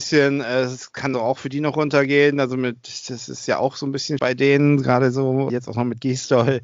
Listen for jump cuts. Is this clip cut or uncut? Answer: cut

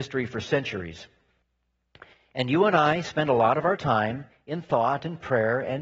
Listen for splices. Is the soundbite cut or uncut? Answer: uncut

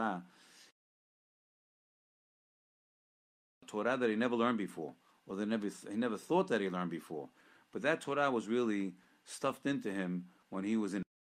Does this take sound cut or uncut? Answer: uncut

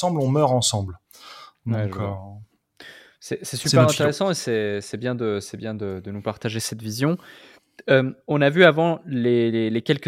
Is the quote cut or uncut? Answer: uncut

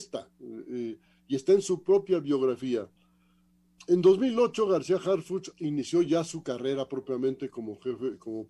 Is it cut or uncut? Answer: uncut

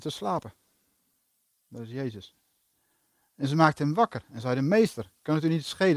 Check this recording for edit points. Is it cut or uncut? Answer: uncut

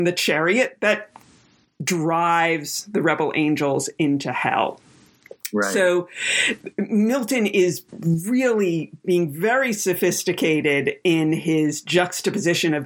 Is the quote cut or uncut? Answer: cut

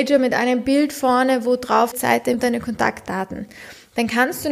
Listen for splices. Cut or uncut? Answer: cut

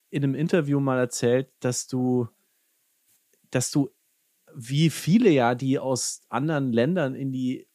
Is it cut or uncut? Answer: uncut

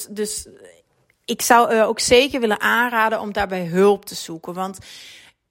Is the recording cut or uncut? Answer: uncut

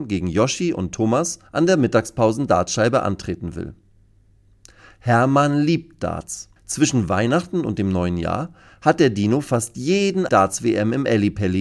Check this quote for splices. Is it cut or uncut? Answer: cut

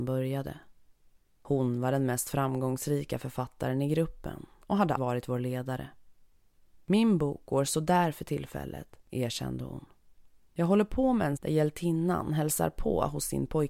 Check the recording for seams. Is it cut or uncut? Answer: cut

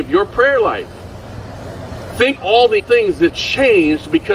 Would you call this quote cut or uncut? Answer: cut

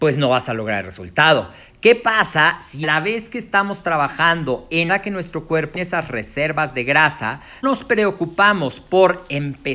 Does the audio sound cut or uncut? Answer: cut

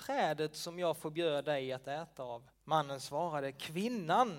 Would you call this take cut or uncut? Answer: cut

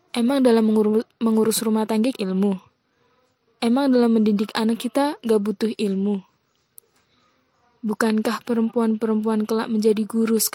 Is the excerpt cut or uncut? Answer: cut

